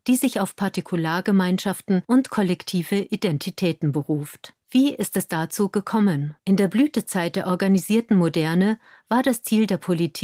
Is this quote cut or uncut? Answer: cut